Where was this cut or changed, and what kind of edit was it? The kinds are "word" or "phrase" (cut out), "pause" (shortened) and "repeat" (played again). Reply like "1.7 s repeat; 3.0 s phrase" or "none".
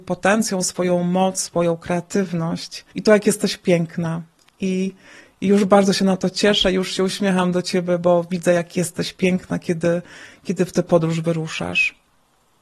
2.9 s pause